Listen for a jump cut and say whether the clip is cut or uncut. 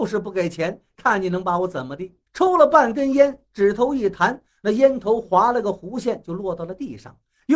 cut